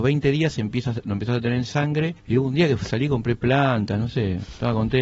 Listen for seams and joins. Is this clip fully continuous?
no; 1 cut; at 2.2 s

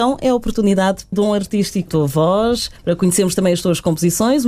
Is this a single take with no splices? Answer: no; 2 cuts; at 1.1 s, 1.9 s

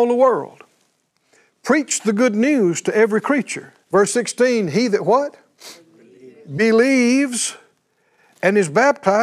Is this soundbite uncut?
no; 1 cut; at 3.8 s

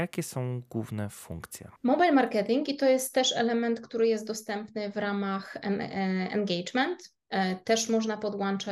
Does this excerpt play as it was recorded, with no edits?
no; 1 cut; at 1.8 s

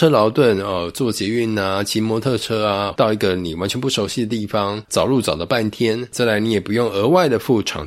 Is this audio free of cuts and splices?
no; 1 cut; at 2.9 s

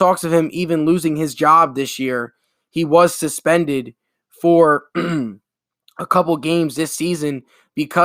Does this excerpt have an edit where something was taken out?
no; 0 cuts

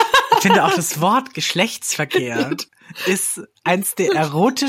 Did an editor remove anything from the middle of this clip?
yes; 1 cut; at 2.7 s

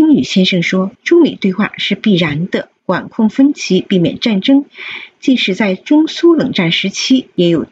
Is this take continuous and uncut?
no; 2 cuts; at 0.9 s, 2.8 s

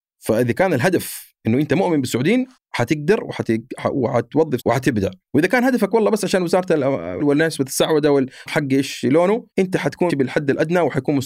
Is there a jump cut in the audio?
yes; 7 cuts; at 2.6 s, 4.6 s, 5.2 s, 7.2 s, 8.5 s, 9.5 s, 10.1 s

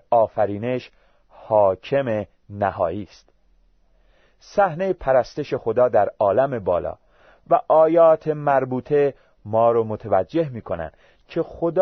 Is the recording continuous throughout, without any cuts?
yes; 0 cuts

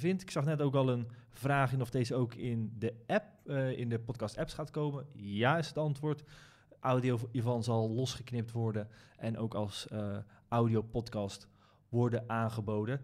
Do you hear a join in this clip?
no; 0 cuts

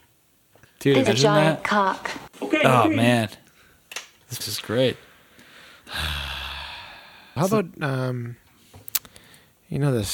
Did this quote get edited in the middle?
yes; 4 cuts; at 1.1 s, 2.3 s, 4.4 s, 7.4 s

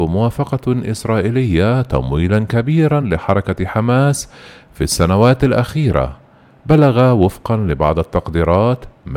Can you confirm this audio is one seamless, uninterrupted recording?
yes; 0 cuts

